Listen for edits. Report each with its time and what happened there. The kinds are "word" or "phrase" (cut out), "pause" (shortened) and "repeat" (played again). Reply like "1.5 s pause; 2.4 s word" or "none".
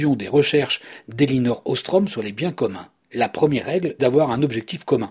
4.0 s word